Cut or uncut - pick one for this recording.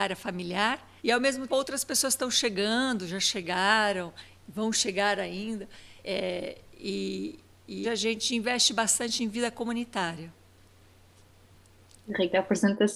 cut